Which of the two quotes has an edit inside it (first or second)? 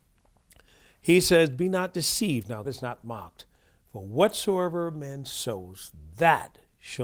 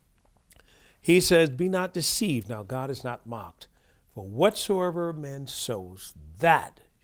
first